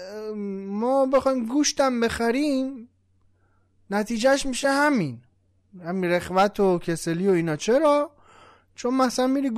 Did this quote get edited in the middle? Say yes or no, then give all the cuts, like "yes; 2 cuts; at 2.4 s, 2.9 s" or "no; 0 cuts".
no; 0 cuts